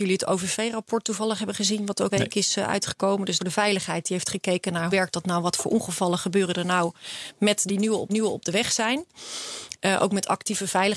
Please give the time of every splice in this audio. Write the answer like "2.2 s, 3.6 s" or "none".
2.1 s, 3.4 s, 4.9 s, 7.7 s, 8.1 s